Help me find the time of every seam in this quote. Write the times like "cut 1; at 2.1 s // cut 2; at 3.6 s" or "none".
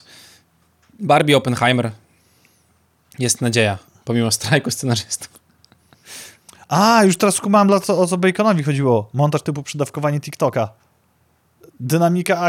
none